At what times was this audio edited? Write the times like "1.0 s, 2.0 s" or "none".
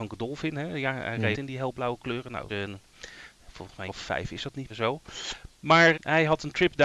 1.3 s, 2.5 s, 3.9 s, 4.7 s, 5.9 s